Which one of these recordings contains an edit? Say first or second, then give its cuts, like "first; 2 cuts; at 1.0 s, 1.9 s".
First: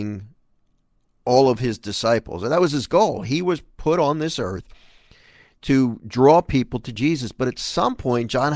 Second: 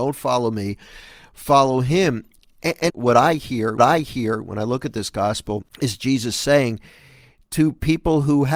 second; 3 cuts; at 2.9 s, 3.8 s, 5.7 s